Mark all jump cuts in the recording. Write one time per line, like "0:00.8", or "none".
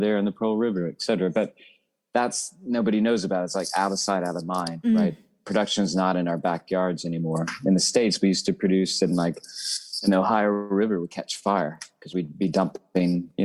none